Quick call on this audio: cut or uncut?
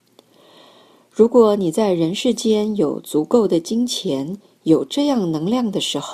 uncut